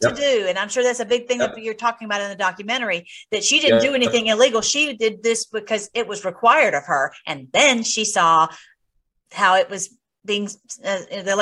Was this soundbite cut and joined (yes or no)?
no